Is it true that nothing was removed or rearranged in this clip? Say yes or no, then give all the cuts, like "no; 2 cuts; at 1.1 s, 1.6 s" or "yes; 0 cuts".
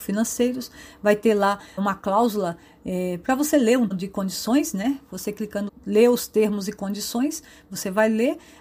no; 3 cuts; at 1.8 s, 3.9 s, 5.7 s